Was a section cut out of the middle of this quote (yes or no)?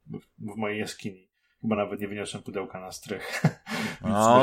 no